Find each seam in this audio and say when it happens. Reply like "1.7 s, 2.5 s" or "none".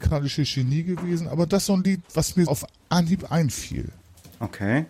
1.7 s, 2.5 s